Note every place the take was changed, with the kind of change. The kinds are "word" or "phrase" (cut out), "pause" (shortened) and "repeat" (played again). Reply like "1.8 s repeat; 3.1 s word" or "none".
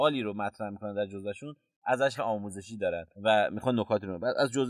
2.2 s word; 3.1 s pause